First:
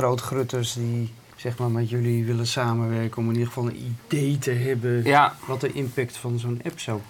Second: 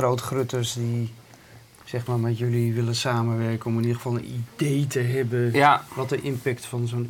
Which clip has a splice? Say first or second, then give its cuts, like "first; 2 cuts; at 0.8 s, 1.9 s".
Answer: first; 1 cut; at 1.3 s